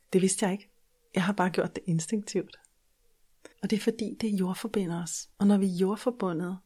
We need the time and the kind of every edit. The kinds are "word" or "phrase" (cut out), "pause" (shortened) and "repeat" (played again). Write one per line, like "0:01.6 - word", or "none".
0:03.5 - pause
0:05.3 - pause